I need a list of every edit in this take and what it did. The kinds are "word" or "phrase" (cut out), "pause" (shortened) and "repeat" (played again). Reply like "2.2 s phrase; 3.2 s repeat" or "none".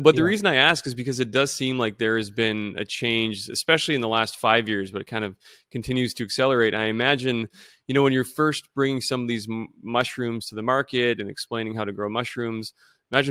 none